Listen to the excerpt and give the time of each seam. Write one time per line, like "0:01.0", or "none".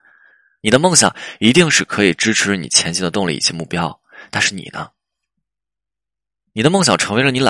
none